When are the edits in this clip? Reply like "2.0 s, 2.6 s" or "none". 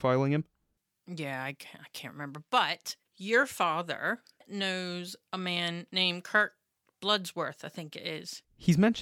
3.0 s